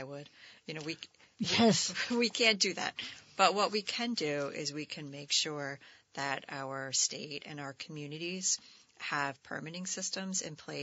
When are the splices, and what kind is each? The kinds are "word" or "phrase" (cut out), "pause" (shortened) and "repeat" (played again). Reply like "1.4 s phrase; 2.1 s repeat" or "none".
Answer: none